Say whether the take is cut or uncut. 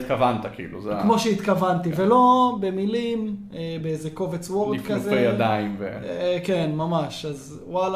uncut